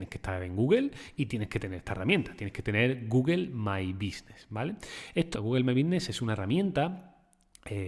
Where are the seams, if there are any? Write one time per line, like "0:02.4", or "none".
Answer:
0:05.3